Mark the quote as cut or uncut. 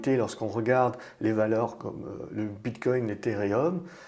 uncut